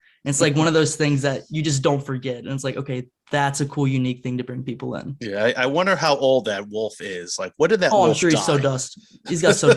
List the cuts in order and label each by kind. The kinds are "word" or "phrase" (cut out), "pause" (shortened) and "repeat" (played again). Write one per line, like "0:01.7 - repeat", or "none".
none